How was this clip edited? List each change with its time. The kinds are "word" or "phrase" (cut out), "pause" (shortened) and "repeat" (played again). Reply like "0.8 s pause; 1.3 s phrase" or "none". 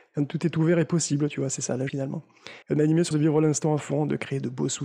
1.9 s word; 2.6 s pause; 3.1 s word